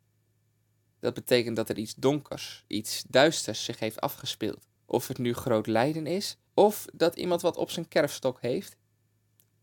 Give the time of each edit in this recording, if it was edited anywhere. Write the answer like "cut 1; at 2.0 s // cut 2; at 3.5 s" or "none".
cut 1; at 4.8 s // cut 2; at 6.5 s